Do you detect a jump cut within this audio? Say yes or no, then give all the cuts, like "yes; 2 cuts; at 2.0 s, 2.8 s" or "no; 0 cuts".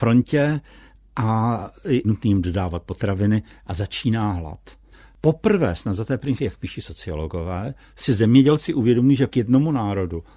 yes; 4 cuts; at 2.0 s, 4.9 s, 6.4 s, 9.3 s